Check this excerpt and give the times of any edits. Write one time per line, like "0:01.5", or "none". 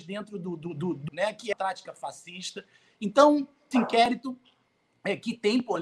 0:01.1
0:01.5
0:03.7